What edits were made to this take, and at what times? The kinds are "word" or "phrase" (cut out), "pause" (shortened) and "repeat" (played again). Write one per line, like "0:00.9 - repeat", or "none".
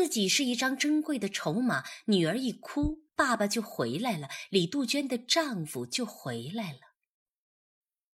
0:03.1 - pause